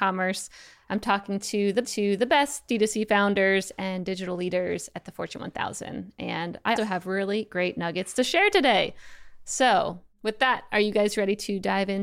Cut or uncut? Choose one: cut